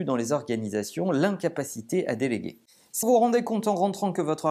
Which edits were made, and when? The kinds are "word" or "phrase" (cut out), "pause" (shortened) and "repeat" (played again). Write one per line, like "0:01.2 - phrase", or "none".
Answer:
0:03.0 - word